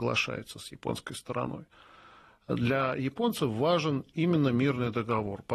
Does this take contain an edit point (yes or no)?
no